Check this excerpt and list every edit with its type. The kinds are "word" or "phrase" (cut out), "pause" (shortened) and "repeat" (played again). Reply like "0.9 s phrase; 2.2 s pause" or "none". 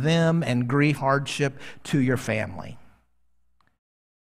1.0 s word